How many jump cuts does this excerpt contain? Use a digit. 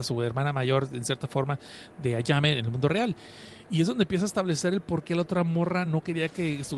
0